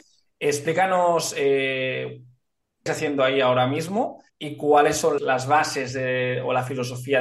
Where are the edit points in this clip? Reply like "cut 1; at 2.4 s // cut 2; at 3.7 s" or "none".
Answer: cut 1; at 2.9 s // cut 2; at 4.3 s // cut 3; at 5.2 s